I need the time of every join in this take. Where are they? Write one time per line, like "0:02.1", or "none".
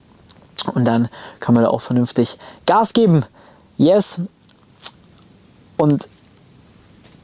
none